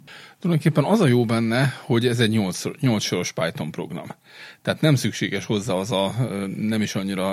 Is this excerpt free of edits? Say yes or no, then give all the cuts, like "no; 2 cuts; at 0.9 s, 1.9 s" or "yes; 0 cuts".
yes; 0 cuts